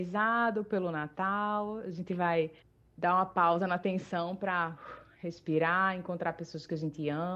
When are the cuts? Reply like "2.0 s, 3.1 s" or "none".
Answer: 2.6 s